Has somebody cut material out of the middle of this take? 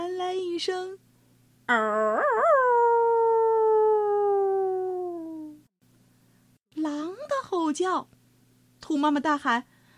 yes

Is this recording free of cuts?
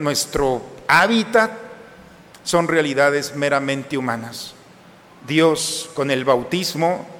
yes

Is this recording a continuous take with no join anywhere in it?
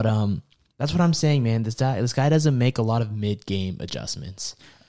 yes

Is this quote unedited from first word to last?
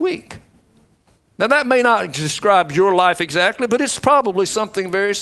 yes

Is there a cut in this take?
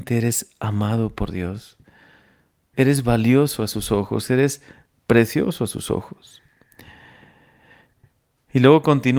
no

